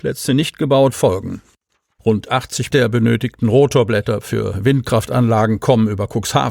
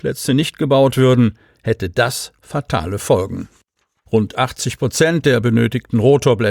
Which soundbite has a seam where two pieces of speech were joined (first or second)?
first